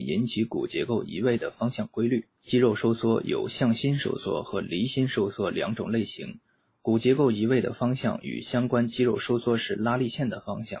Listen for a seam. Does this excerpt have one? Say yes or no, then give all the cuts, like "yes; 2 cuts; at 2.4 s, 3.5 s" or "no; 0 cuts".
yes; 1 cut; at 2.3 s